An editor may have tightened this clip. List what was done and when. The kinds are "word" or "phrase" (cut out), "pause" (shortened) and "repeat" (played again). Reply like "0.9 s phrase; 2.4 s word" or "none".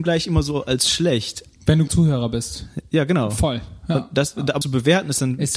1.9 s word; 4.6 s word